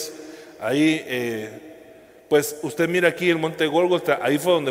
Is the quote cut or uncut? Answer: uncut